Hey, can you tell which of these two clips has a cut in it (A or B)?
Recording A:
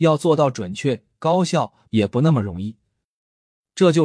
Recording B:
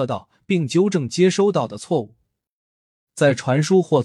A